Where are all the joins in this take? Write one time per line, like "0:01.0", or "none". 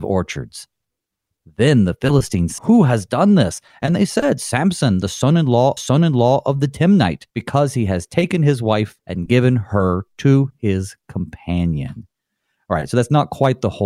0:02.6
0:05.8
0:07.3
0:09.0